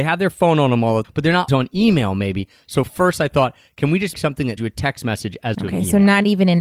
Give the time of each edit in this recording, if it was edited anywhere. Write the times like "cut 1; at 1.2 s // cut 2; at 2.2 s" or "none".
cut 1; at 1.0 s // cut 2; at 1.5 s // cut 3; at 4.1 s // cut 4; at 4.6 s // cut 5; at 5.5 s